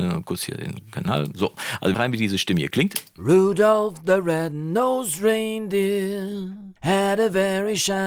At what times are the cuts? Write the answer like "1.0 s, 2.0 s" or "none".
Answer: 1.9 s, 6.8 s